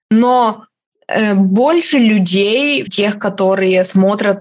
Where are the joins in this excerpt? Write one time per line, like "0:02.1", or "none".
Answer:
0:02.9